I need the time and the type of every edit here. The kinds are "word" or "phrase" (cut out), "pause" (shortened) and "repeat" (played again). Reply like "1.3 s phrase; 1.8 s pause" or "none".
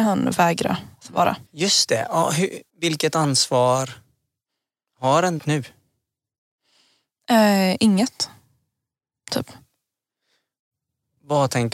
1.5 s pause; 2.7 s pause; 5.4 s phrase